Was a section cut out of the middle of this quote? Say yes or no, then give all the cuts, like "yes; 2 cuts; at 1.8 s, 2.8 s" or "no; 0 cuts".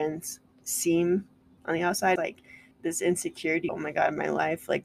yes; 4 cuts; at 1.6 s, 2.2 s, 2.7 s, 3.7 s